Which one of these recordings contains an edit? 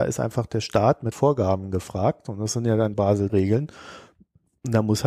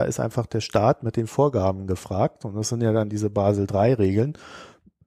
first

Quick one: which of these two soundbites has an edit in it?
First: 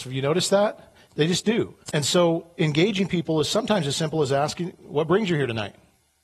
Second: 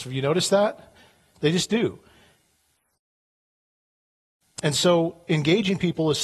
first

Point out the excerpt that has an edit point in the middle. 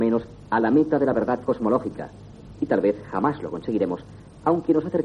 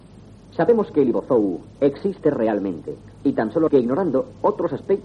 second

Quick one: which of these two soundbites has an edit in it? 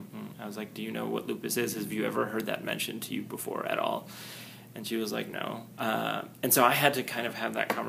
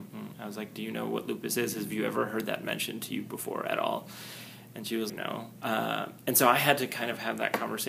second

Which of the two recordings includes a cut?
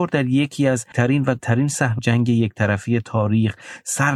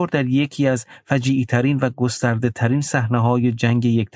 first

